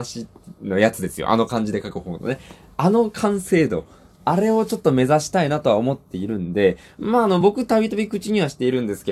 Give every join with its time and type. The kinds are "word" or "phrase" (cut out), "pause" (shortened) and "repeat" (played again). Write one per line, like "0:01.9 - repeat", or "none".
none